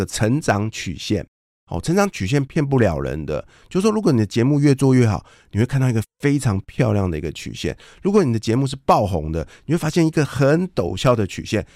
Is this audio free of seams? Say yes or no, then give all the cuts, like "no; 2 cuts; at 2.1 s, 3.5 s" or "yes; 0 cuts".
yes; 0 cuts